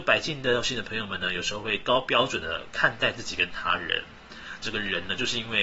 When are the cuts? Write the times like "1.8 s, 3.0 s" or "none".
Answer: 4.6 s